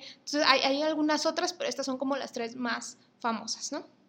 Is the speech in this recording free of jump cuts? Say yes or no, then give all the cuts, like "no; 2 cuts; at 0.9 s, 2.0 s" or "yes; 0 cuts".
yes; 0 cuts